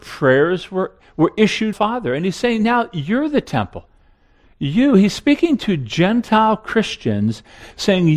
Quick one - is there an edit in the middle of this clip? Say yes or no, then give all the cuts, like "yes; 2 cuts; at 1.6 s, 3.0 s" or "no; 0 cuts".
yes; 1 cut; at 1.7 s